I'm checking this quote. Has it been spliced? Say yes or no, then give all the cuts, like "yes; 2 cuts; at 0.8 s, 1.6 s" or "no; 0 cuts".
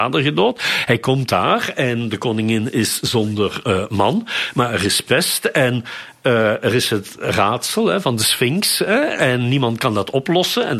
no; 0 cuts